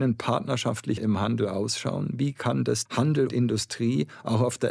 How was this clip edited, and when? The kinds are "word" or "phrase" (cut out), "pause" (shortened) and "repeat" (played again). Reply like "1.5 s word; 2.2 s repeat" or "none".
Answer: 1.0 s word; 2.9 s word; 3.3 s word